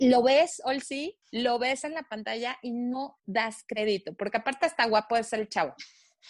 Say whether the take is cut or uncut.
cut